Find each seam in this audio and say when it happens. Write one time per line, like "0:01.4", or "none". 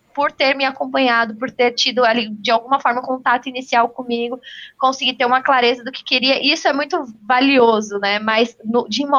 0:07.1